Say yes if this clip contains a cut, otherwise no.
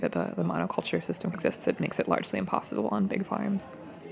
yes